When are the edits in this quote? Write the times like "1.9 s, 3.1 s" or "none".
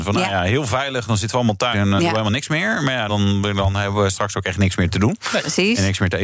1.7 s, 3.1 s